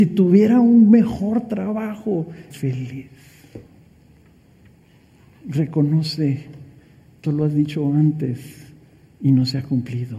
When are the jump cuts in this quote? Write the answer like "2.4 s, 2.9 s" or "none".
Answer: 2.5 s, 7.2 s